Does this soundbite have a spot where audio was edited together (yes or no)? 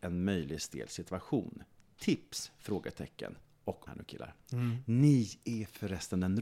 yes